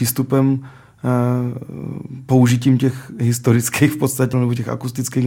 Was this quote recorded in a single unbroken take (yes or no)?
no